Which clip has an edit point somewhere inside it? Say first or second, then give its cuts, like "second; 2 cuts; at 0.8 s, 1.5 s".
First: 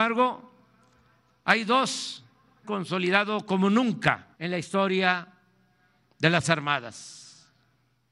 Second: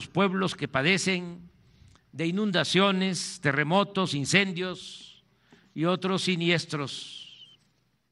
first; 3 cuts; at 2.6 s, 4.3 s, 6.4 s